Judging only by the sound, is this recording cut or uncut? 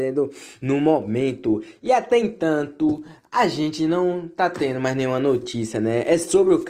uncut